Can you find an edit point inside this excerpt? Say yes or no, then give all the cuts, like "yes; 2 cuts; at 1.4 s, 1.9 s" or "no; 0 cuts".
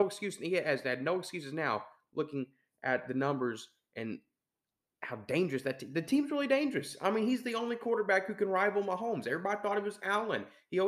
no; 0 cuts